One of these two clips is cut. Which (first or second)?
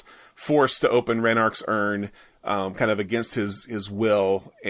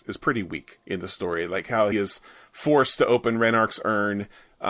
second